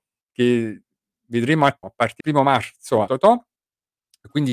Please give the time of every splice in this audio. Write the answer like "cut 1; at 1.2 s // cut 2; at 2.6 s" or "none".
cut 1; at 1.8 s // cut 2; at 2.2 s // cut 3; at 3.1 s

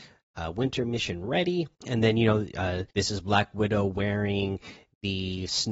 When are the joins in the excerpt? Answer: cut 1; at 1.7 s // cut 2; at 2.9 s

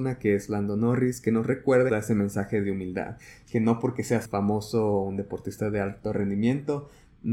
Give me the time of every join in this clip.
cut 1; at 1.9 s // cut 2; at 4.2 s

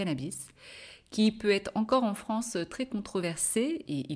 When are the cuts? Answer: none

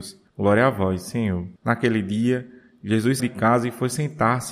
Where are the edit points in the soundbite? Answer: cut 1; at 1.6 s // cut 2; at 3.2 s

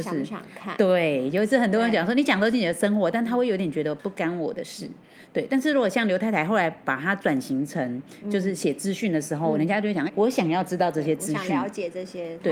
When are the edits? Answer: cut 1; at 10.1 s

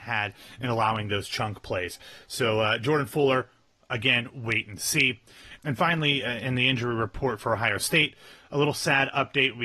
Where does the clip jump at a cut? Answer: none

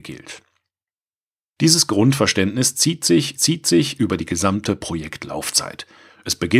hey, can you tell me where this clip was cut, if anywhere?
cut 1; at 3.4 s

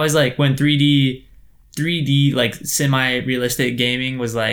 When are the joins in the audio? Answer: none

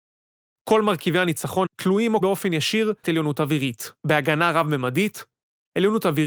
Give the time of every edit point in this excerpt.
cut 1; at 1.7 s // cut 2; at 2.2 s // cut 3; at 3.0 s // cut 4; at 4.0 s

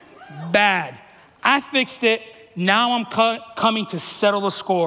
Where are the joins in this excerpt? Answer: none

